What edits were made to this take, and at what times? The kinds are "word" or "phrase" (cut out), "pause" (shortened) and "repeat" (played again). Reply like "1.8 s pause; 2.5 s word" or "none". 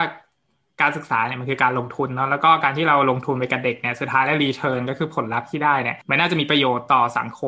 6.0 s pause